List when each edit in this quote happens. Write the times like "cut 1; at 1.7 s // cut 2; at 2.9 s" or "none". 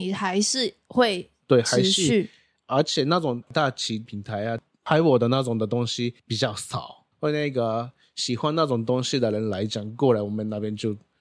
cut 1; at 6.2 s // cut 2; at 7.1 s

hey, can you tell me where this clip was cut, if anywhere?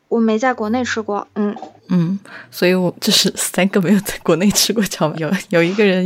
cut 1; at 1.8 s // cut 2; at 5.1 s

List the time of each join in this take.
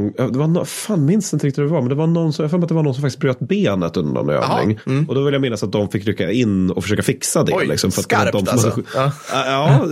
none

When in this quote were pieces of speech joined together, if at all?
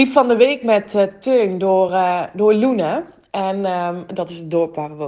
none

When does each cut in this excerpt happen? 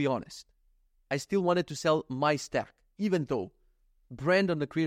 none

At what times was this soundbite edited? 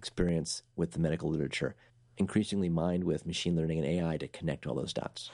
cut 1; at 1.9 s

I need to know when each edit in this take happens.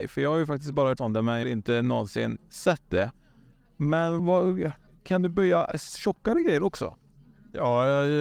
cut 1; at 1.0 s // cut 2; at 1.4 s // cut 3; at 4.2 s // cut 4; at 4.9 s

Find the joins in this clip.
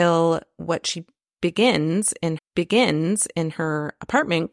cut 1; at 2.4 s

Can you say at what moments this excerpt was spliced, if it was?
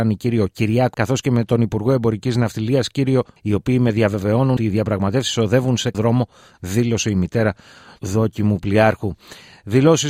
cut 1; at 0.9 s // cut 2; at 3.4 s // cut 3; at 4.6 s // cut 4; at 5.9 s // cut 5; at 8.0 s

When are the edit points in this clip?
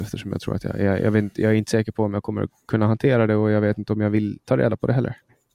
none

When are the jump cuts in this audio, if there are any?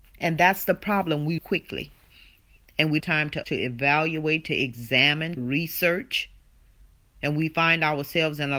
cut 1; at 1.4 s // cut 2; at 3.0 s // cut 3; at 3.4 s // cut 4; at 5.4 s

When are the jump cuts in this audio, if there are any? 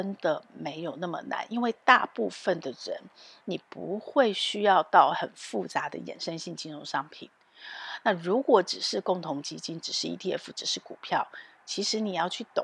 none

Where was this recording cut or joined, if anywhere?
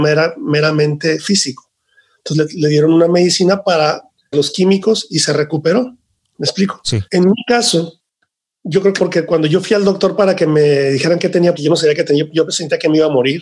cut 1; at 4.3 s // cut 2; at 7.1 s // cut 3; at 9.0 s // cut 4; at 11.6 s

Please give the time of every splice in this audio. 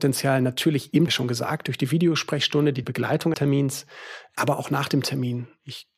cut 1; at 1.1 s // cut 2; at 2.8 s // cut 3; at 3.3 s

